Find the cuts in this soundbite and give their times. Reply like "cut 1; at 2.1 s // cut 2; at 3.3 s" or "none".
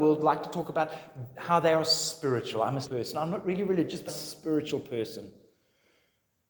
cut 1; at 1.3 s // cut 2; at 2.8 s // cut 3; at 4.1 s